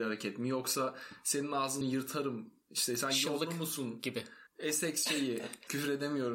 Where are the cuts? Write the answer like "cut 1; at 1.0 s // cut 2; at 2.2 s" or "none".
cut 1; at 1.8 s // cut 2; at 4.5 s